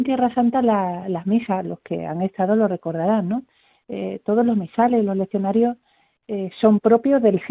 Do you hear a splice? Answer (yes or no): no